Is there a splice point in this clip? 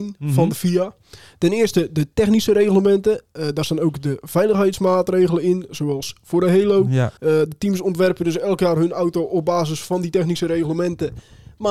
yes; 1 cut; at 7.2 s

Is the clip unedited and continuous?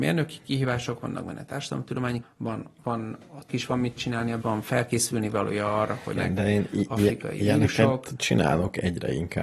no; 5 cuts; at 2.2 s, 2.8 s, 3.5 s, 4.4 s, 6.1 s

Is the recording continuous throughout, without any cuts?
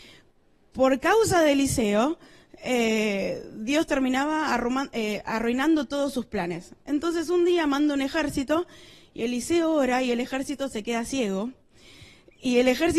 yes; 0 cuts

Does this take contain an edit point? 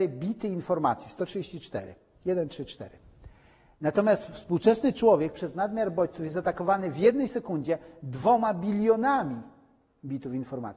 no; 0 cuts

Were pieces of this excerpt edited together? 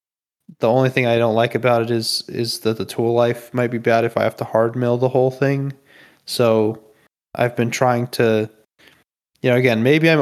no; 0 cuts

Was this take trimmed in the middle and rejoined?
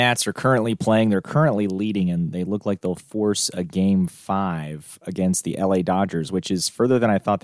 no; 0 cuts

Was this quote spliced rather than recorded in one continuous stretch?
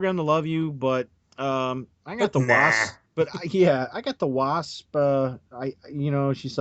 no; 0 cuts

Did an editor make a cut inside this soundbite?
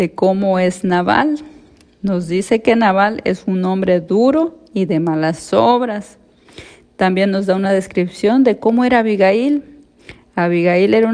no; 0 cuts

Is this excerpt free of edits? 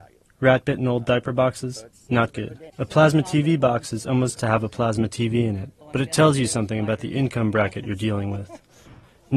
no; 3 cuts; at 2.7 s, 4.4 s, 5.8 s

